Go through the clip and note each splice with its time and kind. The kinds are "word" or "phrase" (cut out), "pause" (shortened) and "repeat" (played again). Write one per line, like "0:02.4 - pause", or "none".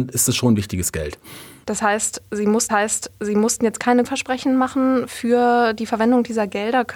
0:02.7 - repeat
0:04.0 - word